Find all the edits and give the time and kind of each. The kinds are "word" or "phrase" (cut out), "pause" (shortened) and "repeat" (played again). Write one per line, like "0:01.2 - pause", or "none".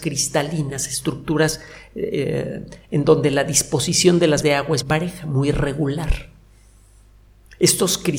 0:04.4 - word
0:04.8 - word